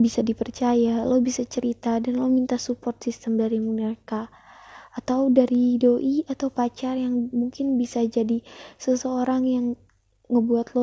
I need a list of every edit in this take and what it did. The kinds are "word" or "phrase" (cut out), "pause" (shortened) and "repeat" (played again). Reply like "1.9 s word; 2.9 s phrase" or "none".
none